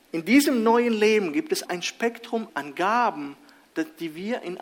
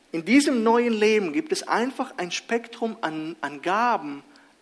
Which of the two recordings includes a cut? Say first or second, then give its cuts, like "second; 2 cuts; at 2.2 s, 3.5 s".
first; 2 cuts; at 1.7 s, 2.5 s